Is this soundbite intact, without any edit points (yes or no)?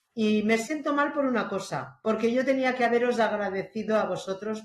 yes